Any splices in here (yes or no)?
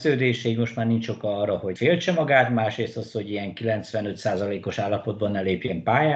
yes